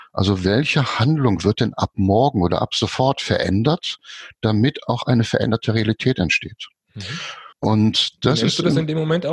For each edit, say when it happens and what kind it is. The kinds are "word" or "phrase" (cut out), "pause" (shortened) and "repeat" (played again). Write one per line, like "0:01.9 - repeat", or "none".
0:07.5 - pause